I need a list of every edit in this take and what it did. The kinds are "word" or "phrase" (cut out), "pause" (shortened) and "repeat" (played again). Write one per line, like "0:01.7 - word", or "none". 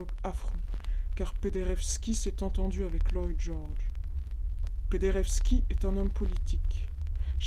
none